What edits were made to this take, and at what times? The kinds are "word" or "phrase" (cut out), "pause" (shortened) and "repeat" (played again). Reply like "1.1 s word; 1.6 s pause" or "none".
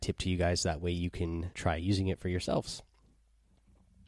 1.5 s word